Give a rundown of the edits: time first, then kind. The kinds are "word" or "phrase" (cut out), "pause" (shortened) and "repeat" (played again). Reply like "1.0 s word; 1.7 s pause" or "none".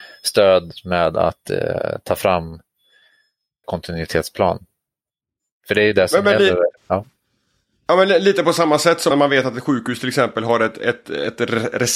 3.6 s word; 6.8 s pause; 9.1 s word